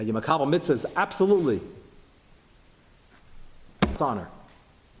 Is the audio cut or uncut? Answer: cut